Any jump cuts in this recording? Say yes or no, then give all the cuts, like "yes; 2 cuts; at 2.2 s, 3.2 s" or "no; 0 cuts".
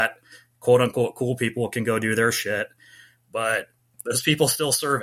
no; 0 cuts